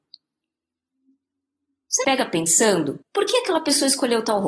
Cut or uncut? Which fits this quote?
cut